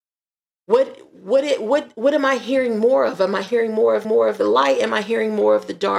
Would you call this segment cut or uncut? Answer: cut